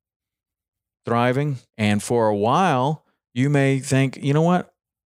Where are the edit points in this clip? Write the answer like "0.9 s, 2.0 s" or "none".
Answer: 1.7 s